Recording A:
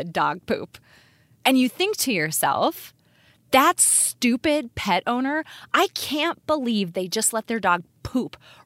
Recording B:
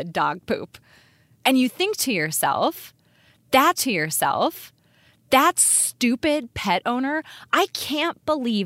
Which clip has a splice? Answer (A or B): B